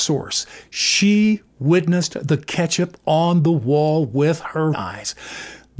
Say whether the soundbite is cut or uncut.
cut